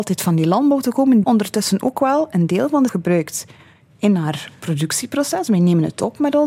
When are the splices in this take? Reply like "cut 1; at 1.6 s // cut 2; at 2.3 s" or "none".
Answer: cut 1; at 1.2 s // cut 2; at 2.9 s